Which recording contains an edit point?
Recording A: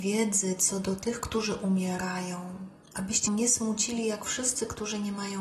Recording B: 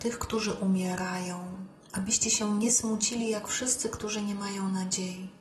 A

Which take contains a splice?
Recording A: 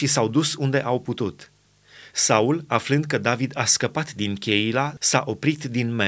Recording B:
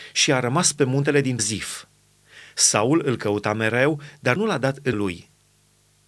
B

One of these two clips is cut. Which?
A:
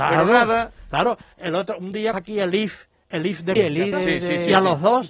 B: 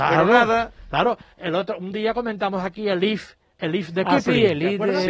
A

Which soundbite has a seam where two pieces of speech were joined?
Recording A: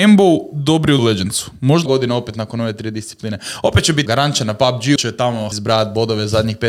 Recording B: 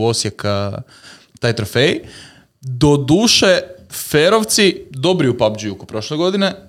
A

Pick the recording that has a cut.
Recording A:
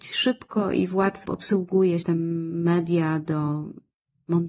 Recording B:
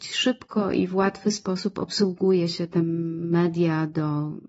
A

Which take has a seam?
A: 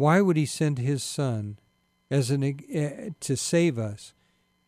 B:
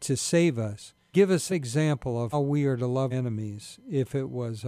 B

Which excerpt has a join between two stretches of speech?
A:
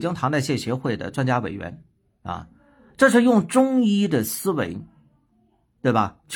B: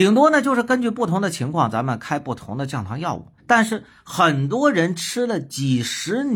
B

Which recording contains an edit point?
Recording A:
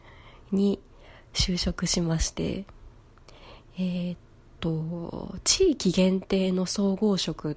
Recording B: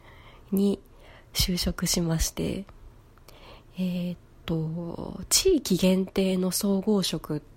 A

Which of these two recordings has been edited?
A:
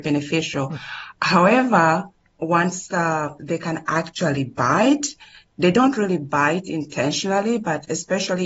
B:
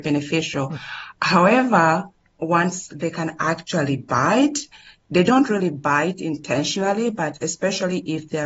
B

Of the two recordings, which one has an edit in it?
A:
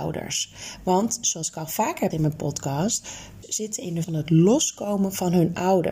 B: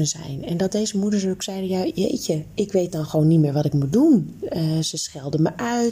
A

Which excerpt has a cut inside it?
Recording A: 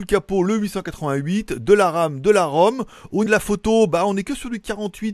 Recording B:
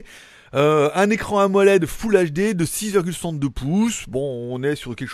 A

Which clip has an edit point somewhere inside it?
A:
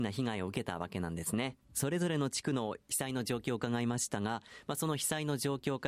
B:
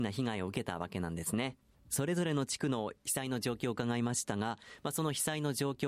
A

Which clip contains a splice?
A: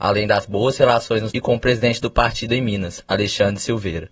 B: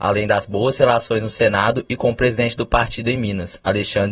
A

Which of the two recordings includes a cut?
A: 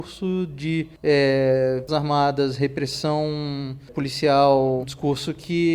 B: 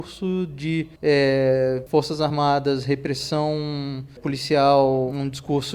A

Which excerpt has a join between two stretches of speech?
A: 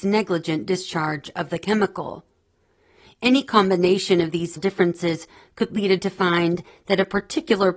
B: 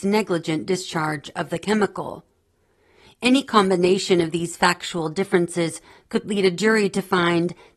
A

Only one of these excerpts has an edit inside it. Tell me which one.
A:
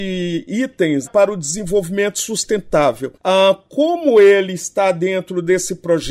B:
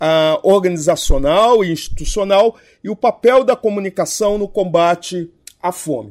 A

